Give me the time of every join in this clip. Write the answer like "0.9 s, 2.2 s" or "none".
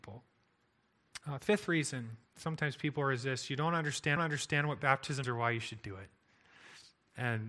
1.2 s, 2.3 s, 4.2 s, 5.2 s